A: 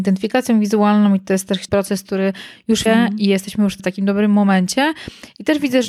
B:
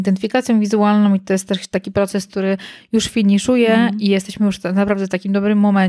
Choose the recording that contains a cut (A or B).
A